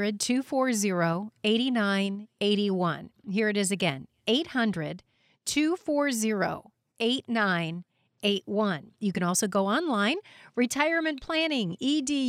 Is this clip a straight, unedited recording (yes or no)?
yes